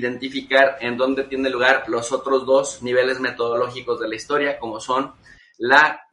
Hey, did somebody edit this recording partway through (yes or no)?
no